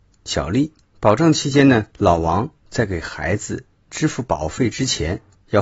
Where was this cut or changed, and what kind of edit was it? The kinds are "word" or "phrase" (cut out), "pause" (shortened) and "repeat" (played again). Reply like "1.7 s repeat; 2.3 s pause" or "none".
1.9 s pause